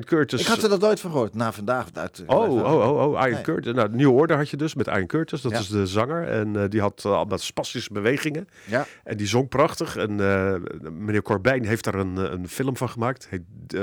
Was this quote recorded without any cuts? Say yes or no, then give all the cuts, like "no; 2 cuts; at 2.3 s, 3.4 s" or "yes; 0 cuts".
yes; 0 cuts